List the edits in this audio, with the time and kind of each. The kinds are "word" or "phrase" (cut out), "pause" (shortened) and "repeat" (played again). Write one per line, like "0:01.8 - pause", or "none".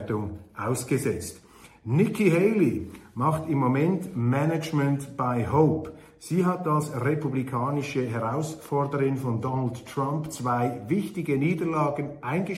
none